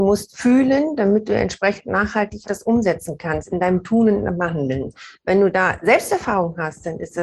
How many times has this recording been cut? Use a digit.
1